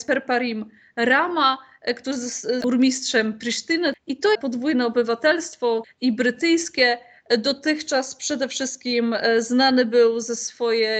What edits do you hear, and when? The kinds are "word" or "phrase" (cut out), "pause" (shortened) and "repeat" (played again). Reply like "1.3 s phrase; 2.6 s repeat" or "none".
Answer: 2.6 s word; 4.3 s phrase; 5.8 s word